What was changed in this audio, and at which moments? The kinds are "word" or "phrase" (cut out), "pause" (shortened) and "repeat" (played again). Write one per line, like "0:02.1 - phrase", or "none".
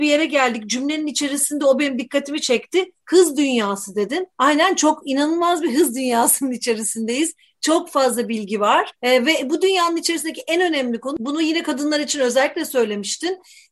0:04.3 - pause
0:09.0 - pause